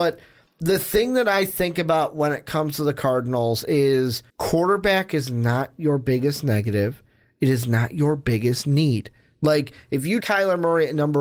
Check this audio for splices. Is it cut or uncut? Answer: cut